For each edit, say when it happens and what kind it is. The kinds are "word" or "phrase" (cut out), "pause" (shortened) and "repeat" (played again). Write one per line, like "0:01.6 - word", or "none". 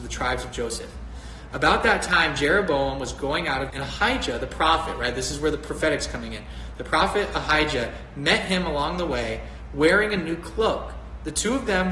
0:03.7 - word